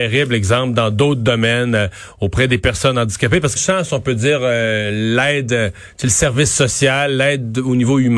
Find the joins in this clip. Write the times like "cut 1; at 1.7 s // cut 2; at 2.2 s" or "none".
cut 1; at 3.6 s